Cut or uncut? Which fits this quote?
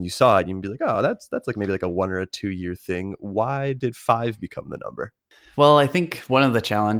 uncut